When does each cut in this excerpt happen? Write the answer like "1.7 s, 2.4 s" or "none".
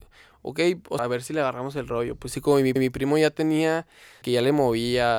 1.0 s, 2.8 s, 4.2 s